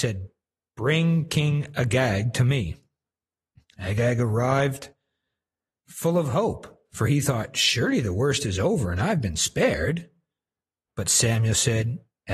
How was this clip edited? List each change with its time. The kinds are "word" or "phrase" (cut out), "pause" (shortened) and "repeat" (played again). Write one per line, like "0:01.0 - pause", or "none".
none